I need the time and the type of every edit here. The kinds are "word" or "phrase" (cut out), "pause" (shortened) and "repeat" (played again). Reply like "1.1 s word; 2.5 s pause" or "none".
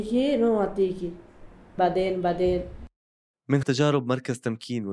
1.8 s word; 3.6 s word